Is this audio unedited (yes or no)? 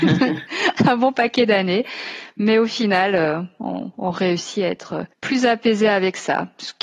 no